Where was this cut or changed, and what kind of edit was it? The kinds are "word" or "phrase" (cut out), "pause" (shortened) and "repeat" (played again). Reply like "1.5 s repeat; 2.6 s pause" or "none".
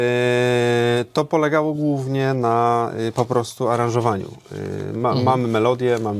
none